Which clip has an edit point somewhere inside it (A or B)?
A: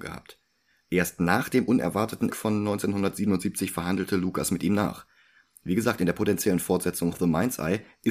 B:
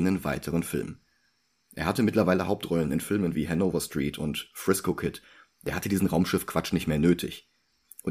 A